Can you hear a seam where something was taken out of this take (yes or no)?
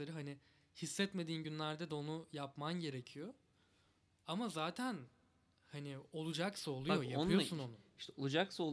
no